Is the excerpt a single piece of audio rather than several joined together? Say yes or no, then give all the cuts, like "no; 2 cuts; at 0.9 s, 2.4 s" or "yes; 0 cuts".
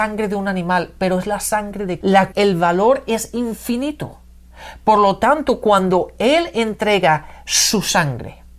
no; 2 cuts; at 2.0 s, 2.3 s